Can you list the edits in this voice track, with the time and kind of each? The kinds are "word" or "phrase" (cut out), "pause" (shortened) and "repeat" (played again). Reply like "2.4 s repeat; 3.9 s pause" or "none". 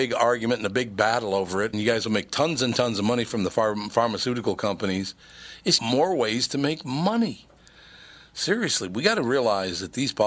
1.7 s word; 5.8 s word